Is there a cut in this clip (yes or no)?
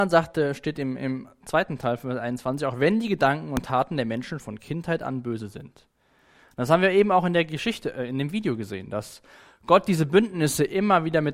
yes